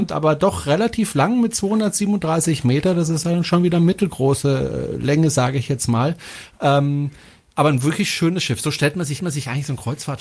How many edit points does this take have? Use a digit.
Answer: 1